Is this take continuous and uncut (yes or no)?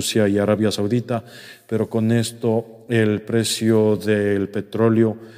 yes